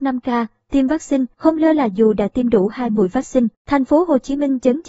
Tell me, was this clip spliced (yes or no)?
yes